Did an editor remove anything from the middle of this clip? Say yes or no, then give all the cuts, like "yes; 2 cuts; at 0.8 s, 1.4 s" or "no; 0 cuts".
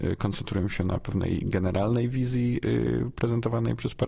no; 0 cuts